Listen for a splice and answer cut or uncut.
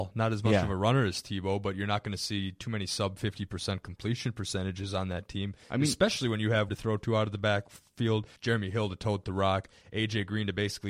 cut